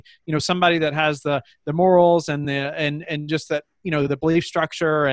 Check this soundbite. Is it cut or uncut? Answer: uncut